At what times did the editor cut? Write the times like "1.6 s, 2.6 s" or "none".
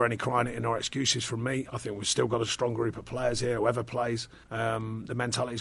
4.4 s